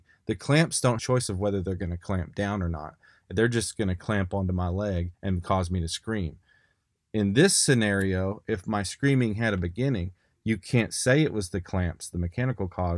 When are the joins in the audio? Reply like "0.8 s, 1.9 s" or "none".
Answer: 1.0 s, 5.1 s